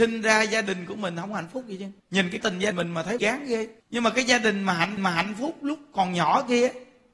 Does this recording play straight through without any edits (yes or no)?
no